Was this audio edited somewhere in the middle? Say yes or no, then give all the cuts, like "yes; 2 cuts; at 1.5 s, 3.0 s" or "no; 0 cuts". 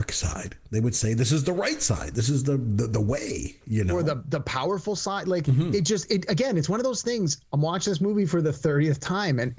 no; 0 cuts